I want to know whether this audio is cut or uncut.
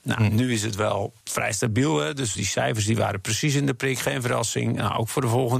cut